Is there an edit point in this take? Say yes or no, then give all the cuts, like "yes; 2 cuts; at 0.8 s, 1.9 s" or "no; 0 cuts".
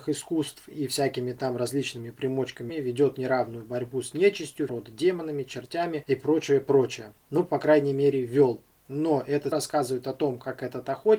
yes; 3 cuts; at 2.7 s, 4.7 s, 9.5 s